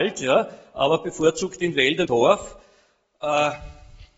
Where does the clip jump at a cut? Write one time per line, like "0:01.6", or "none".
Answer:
0:02.0